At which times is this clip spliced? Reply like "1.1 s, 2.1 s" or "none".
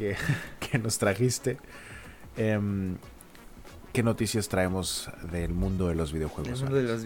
none